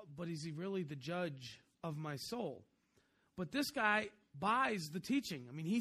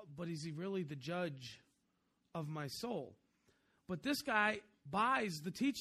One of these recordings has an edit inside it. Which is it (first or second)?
first